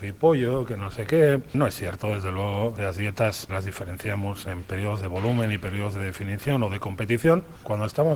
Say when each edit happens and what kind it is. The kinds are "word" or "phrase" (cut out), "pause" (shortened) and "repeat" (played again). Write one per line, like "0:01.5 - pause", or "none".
0:03.5 - word